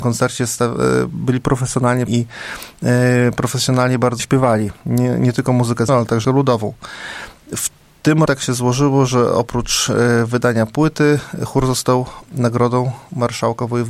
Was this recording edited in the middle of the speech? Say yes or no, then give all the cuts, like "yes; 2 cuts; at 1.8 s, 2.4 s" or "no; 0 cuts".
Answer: yes; 6 cuts; at 2.1 s, 4.2 s, 5.9 s, 6.2 s, 8.3 s, 12.2 s